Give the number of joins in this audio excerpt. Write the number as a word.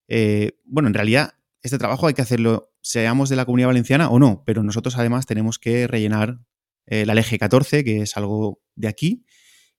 zero